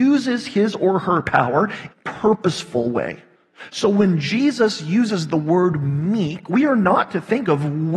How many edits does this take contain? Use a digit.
1